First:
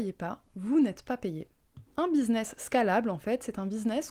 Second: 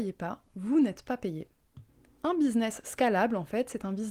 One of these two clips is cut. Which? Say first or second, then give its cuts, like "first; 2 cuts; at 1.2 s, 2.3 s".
first; 1 cut; at 1.9 s